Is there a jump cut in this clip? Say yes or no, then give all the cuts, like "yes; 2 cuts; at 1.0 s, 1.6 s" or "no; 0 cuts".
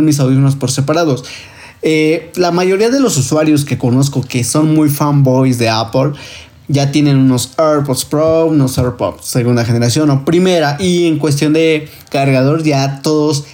no; 0 cuts